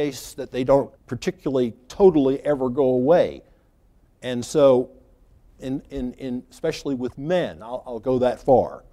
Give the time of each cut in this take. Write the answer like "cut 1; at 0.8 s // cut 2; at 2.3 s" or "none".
cut 1; at 1.0 s

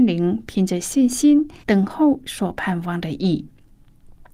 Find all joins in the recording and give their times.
cut 1; at 1.6 s

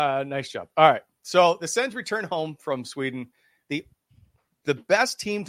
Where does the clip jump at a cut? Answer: none

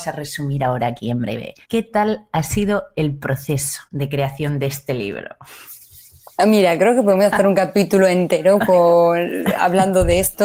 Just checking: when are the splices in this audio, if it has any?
cut 1; at 1.6 s // cut 2; at 3.8 s

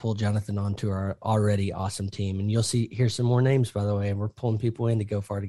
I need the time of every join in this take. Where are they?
none

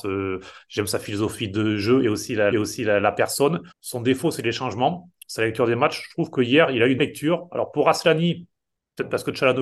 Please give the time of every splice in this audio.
cut 1; at 2.5 s // cut 2; at 3.7 s // cut 3; at 7.0 s

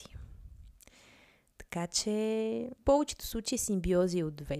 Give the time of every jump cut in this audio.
cut 1; at 2.8 s

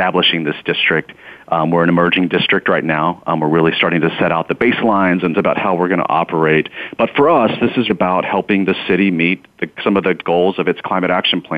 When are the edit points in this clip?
cut 1; at 5.3 s // cut 2; at 7.9 s // cut 3; at 9.7 s

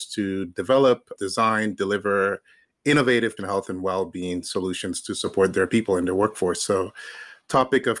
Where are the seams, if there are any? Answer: cut 1; at 1.2 s // cut 2; at 3.4 s

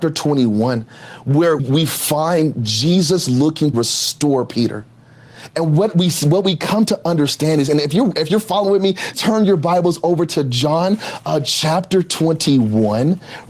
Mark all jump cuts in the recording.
cut 1; at 1.6 s // cut 2; at 3.7 s // cut 3; at 9.1 s

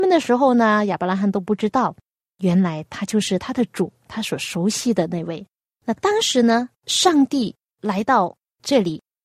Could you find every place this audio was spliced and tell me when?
cut 1; at 4.0 s // cut 2; at 6.7 s

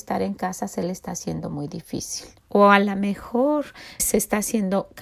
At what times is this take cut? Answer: cut 1; at 2.4 s // cut 2; at 4.0 s

